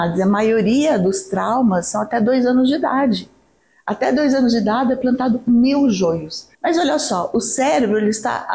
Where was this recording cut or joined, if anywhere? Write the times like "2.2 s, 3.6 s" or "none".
6.5 s